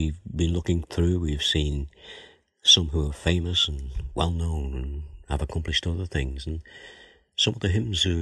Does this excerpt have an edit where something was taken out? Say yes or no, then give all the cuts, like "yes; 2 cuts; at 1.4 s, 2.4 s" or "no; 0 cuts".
no; 0 cuts